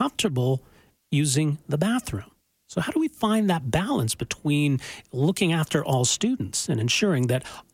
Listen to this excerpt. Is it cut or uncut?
uncut